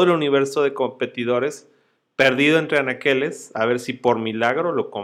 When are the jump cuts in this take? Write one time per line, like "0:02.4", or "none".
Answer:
none